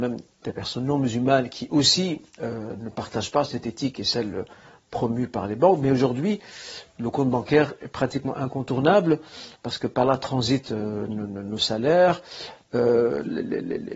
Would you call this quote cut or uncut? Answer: cut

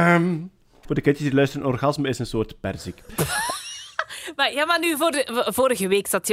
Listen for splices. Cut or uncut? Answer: uncut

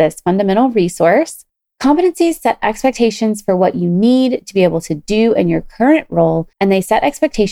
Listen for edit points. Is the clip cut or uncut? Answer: cut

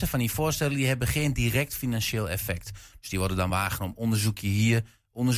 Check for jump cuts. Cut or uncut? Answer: uncut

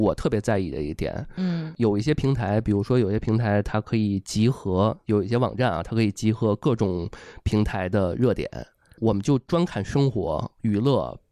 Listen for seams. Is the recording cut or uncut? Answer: uncut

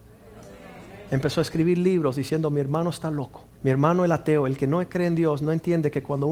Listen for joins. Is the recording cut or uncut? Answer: cut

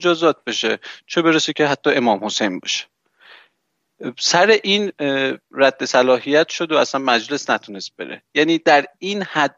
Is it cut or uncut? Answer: uncut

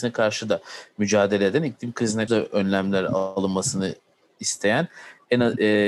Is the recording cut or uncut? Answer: cut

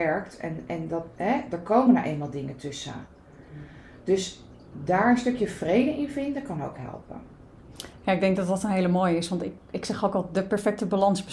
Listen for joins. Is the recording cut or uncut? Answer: uncut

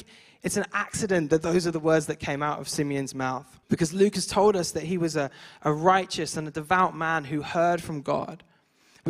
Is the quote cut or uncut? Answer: cut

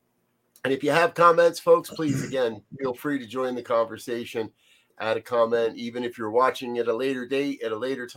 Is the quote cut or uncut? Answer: uncut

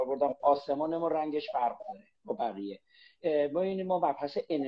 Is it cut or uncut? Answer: cut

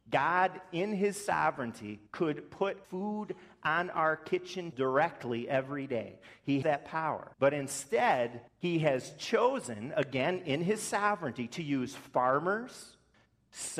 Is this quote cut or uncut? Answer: cut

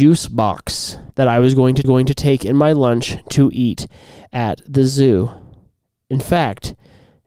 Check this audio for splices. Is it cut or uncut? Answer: cut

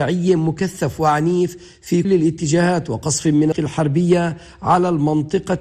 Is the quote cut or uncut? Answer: cut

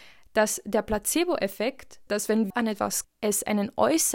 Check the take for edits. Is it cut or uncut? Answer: cut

